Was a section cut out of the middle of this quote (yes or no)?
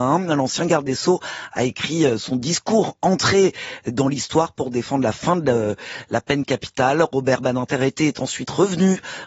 no